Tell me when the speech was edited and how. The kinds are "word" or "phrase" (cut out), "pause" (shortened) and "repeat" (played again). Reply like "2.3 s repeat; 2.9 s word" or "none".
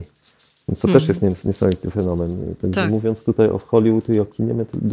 none

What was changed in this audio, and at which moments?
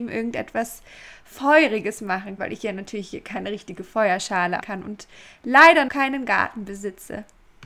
2.4 s word; 4.6 s word; 5.9 s word

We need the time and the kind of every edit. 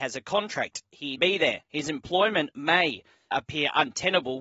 1.2 s phrase; 1.6 s pause; 3.3 s word

